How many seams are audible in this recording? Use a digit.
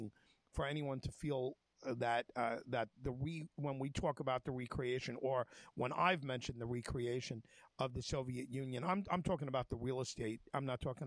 0